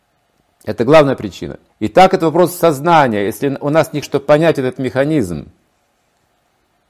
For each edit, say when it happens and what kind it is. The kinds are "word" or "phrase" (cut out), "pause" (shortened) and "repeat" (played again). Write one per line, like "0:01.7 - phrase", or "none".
0:01.7 - pause
0:04.0 - phrase